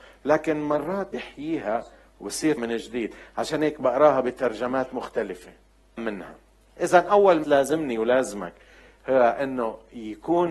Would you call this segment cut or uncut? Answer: cut